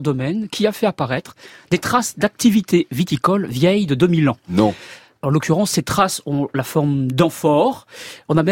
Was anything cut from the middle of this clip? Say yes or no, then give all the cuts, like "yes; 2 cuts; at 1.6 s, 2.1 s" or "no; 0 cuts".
no; 0 cuts